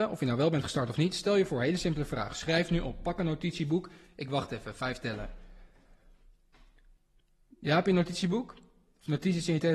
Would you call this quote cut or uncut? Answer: uncut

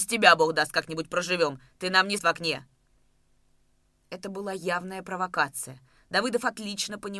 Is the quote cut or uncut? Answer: cut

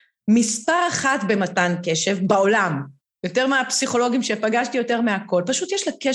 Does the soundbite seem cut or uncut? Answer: cut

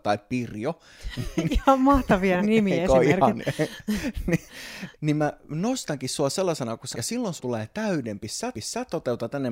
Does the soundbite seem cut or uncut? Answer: cut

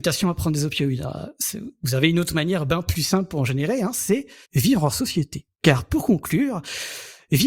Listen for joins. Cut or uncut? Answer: cut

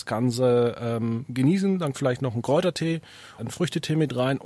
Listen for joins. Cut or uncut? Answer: cut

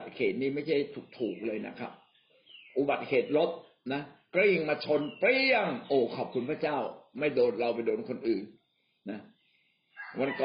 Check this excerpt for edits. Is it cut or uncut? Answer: uncut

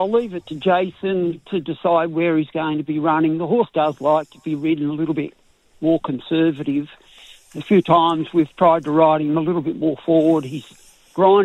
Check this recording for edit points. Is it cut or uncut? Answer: uncut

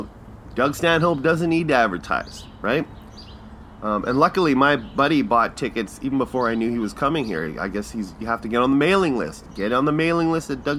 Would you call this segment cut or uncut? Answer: uncut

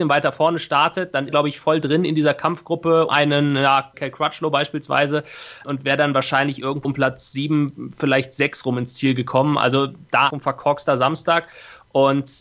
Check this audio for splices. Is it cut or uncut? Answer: cut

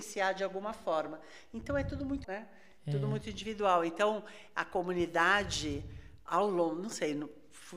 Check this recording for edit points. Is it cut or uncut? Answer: cut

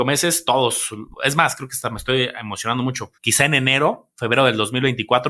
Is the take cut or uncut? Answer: cut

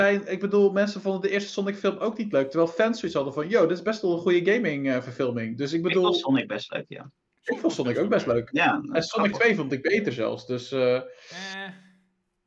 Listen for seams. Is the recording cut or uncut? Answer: uncut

